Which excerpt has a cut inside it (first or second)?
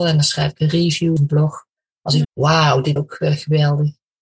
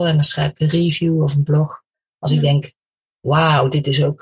first